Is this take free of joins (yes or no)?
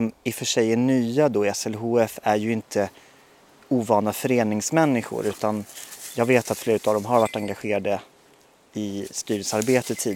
yes